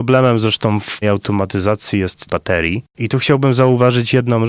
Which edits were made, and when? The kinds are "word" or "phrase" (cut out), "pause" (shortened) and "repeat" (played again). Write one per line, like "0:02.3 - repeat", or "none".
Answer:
0:01.0 - word
0:02.3 - phrase